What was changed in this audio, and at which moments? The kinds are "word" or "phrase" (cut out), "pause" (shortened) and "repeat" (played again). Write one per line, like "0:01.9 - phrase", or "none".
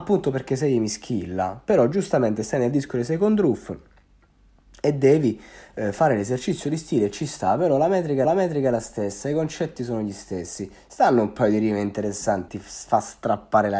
0:08.2 - repeat
0:12.5 - word